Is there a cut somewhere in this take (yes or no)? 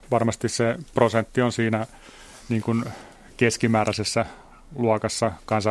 no